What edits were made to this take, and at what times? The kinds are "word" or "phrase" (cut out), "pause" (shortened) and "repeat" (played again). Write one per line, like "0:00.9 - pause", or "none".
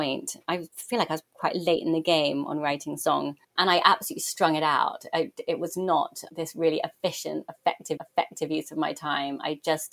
0:03.4 - pause
0:08.0 - repeat